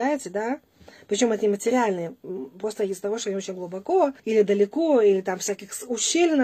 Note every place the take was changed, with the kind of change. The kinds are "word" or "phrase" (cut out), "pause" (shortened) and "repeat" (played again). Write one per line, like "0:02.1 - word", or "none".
0:04.2 - pause